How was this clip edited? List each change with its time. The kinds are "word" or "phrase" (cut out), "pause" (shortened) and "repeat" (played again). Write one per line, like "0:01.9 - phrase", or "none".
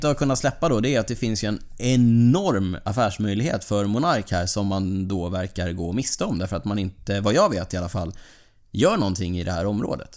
none